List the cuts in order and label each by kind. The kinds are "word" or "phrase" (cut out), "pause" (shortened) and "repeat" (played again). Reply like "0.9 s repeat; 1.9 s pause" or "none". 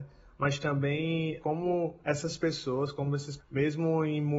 1.4 s word; 2.0 s pause; 3.4 s word